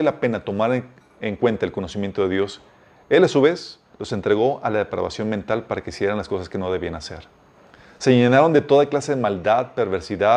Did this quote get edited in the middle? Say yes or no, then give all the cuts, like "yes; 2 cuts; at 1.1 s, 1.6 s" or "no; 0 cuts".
no; 0 cuts